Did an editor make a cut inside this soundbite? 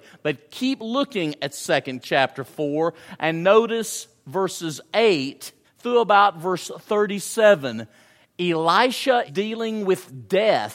yes; 3 cuts; at 2.0 s, 5.6 s, 9.3 s

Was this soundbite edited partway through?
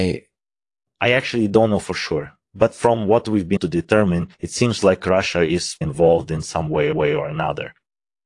yes; 4 cuts; at 3.6 s, 4.3 s, 5.8 s, 6.9 s

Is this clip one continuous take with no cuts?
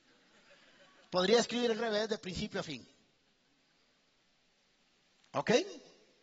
no; 1 cut; at 1.8 s

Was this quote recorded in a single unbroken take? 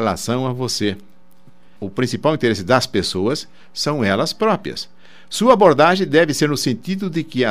yes; 0 cuts

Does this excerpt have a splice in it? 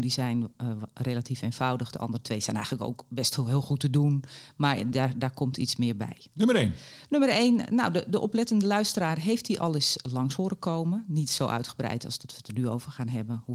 no; 0 cuts

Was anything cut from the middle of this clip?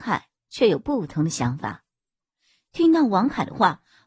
no; 0 cuts

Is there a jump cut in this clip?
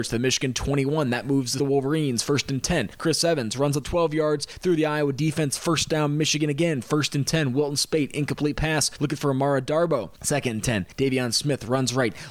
yes; 2 cuts; at 1.6 s, 3.8 s

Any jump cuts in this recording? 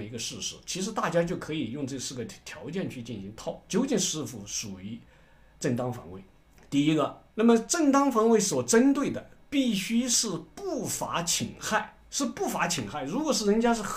yes; 4 cuts; at 3.7 s, 6.4 s, 7.3 s, 12.0 s

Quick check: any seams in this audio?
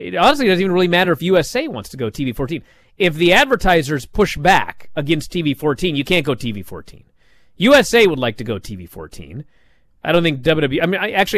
no; 0 cuts

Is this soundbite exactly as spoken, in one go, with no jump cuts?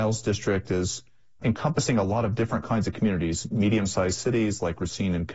no; 1 cut; at 1.4 s

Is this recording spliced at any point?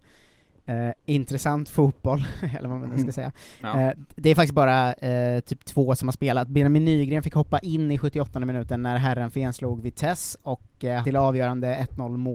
yes; 1 cut; at 11.0 s

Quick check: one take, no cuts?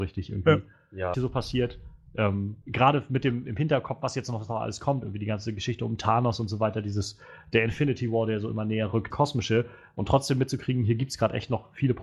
no; 3 cuts; at 1.1 s, 2.6 s, 9.1 s

